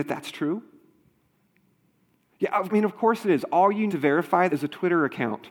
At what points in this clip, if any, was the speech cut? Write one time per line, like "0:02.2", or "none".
0:02.7
0:03.9
0:04.5